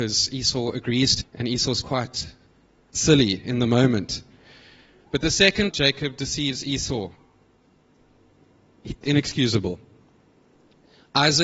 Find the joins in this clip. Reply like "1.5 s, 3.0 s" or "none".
1.2 s, 1.8 s, 2.9 s, 5.7 s, 9.0 s

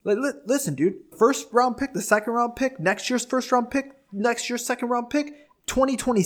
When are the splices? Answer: 1.1 s

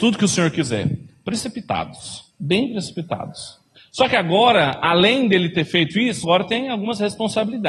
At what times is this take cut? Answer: 2.3 s, 3.8 s, 6.2 s

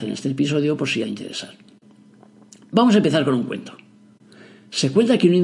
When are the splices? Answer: 1.0 s

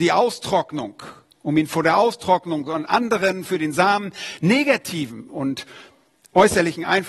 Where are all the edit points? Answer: none

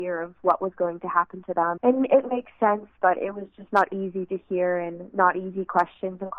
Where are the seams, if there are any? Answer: 1.8 s

